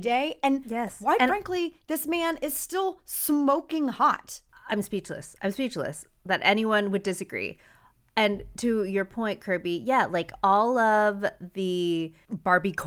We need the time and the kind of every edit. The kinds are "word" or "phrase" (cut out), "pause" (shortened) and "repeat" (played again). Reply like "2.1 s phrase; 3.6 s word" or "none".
none